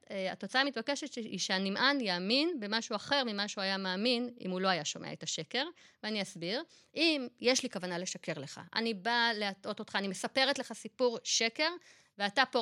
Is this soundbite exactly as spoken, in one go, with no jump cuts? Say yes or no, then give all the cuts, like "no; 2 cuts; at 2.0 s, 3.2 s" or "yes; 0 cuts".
yes; 0 cuts